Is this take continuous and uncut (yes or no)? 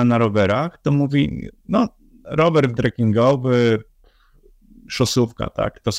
no